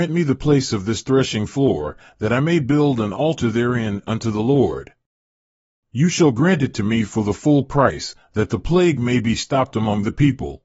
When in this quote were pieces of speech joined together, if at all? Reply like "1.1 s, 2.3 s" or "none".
none

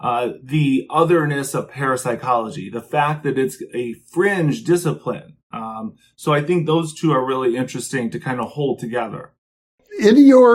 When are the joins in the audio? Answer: none

